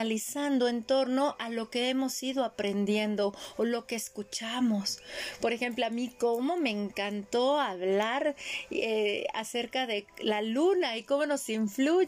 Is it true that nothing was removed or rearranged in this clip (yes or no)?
yes